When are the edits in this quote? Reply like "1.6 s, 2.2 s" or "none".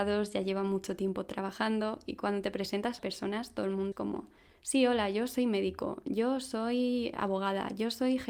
3.0 s, 3.9 s, 7.1 s